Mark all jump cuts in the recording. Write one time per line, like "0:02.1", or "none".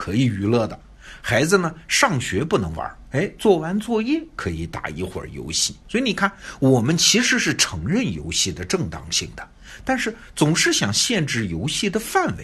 0:05.8